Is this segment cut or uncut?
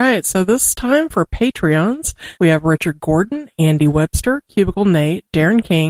cut